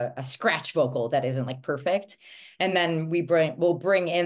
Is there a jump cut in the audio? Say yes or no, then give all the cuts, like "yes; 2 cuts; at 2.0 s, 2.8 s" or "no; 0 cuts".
no; 0 cuts